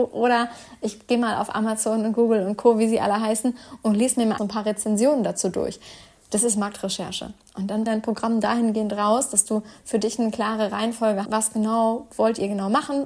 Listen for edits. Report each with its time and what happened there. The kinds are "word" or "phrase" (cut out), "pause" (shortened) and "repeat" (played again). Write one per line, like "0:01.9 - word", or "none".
0:04.4 - word
0:07.9 - word
0:11.2 - word